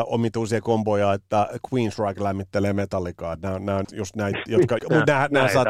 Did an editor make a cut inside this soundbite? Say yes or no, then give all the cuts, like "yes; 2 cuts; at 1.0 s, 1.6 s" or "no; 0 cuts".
yes; 2 cuts; at 3.8 s, 4.8 s